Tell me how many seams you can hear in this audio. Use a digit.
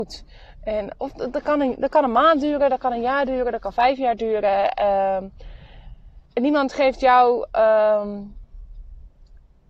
1